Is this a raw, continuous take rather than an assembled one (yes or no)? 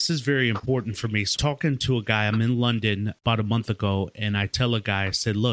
no